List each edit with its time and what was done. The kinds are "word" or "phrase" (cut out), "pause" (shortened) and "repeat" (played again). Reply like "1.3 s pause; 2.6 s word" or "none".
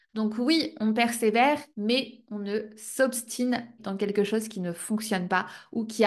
1.7 s pause; 3.8 s word